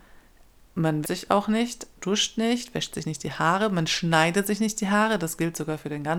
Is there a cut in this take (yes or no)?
yes